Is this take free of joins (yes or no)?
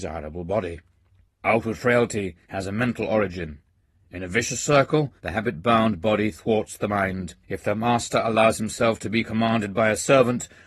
no